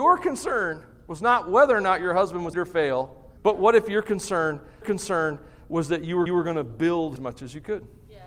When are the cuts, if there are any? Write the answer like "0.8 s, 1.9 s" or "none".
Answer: 2.5 s, 3.4 s, 4.8 s, 6.3 s, 7.2 s